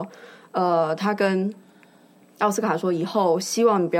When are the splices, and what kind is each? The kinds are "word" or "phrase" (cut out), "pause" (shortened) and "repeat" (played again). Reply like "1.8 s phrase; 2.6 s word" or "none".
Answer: none